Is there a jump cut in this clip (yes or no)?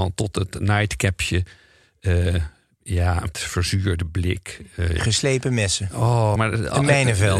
yes